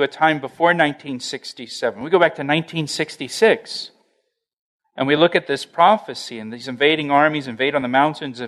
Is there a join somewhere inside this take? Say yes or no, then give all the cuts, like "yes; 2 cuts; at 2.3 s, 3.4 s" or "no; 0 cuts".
no; 0 cuts